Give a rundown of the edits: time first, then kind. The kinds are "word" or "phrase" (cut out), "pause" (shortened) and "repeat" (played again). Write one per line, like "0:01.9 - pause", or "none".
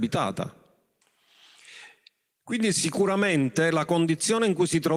none

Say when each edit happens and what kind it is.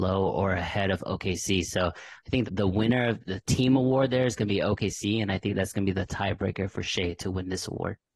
0:02.4 - word
0:03.2 - word

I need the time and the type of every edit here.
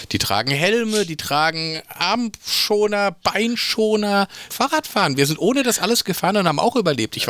0:04.5 - phrase

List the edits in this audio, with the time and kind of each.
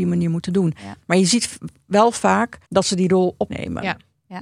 0:02.6 - pause
0:03.5 - word

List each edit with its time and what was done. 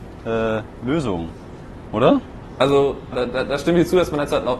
0:03.1 - word

